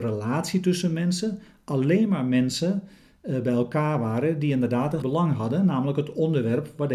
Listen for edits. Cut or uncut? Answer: cut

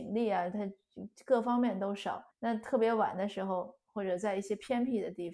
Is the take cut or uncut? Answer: cut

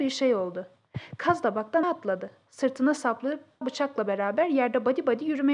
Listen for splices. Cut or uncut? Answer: cut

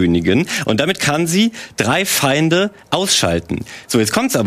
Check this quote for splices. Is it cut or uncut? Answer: uncut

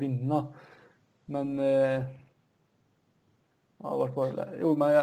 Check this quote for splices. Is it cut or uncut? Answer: uncut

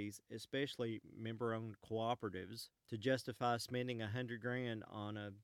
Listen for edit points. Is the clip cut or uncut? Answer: cut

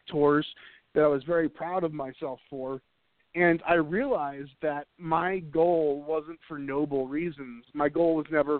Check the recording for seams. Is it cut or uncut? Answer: uncut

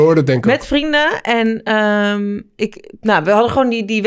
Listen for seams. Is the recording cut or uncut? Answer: uncut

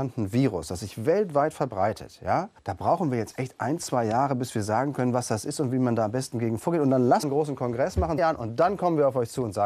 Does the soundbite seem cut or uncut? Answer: cut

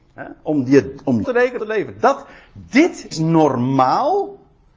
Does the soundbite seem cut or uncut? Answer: cut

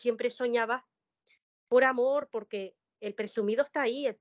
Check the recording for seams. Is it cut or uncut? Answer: uncut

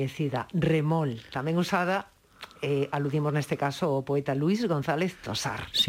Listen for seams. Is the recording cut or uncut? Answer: uncut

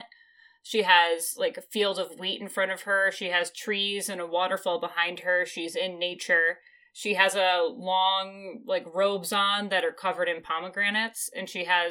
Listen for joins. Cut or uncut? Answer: uncut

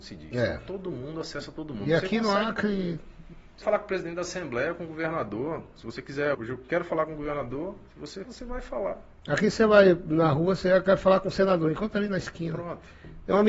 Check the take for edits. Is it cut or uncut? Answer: cut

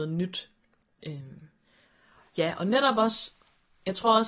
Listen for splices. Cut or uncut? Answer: uncut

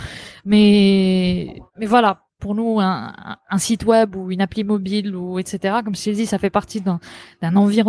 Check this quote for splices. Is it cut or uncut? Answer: cut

